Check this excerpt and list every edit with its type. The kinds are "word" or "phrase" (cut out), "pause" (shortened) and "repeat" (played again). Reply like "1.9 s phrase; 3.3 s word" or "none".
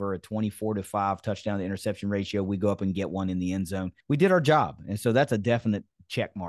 4.0 s pause